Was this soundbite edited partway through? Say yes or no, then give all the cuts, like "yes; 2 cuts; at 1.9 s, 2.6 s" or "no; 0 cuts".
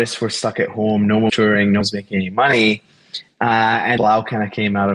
yes; 3 cuts; at 1.3 s, 1.8 s, 4.0 s